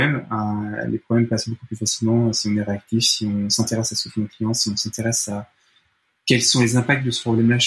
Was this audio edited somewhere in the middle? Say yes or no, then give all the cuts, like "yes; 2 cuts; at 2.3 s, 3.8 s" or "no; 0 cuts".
no; 0 cuts